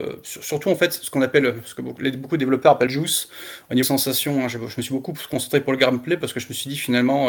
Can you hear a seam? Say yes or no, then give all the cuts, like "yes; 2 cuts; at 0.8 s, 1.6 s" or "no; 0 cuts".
yes; 2 cuts; at 2.9 s, 3.8 s